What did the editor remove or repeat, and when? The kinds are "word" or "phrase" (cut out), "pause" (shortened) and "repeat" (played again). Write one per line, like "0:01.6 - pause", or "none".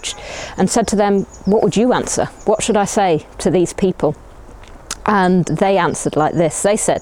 0:05.4 - word